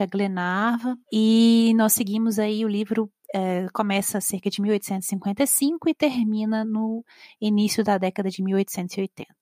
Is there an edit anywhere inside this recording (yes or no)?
yes